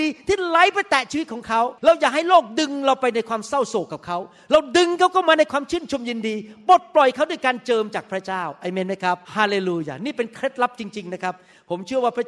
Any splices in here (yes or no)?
yes